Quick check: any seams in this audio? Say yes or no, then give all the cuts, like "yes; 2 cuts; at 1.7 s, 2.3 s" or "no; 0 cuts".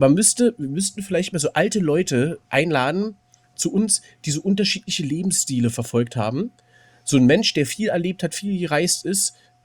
no; 0 cuts